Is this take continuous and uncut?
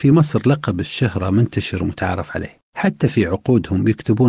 no; 1 cut; at 2.7 s

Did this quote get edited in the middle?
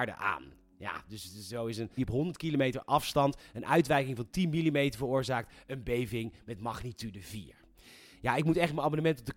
yes; 1 cut; at 2.0 s

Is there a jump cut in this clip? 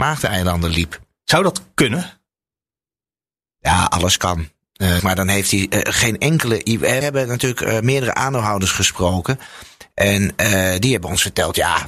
yes; 2 cuts; at 5.0 s, 7.0 s

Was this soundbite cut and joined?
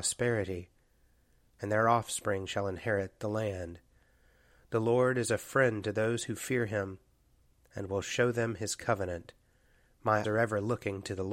yes; 1 cut; at 10.2 s

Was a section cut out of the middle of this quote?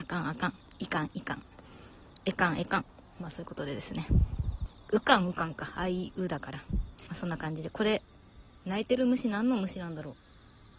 no; 0 cuts

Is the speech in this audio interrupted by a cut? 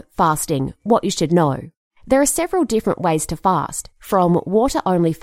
no; 0 cuts

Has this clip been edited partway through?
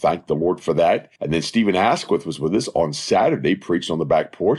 yes; 1 cut; at 1.2 s

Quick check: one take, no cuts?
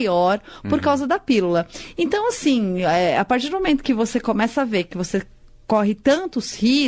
yes; 0 cuts

